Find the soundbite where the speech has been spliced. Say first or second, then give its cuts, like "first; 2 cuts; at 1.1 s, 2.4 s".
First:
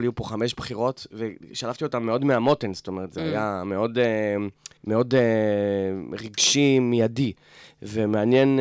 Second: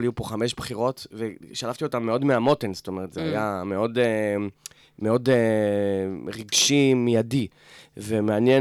first; 1 cut; at 4.8 s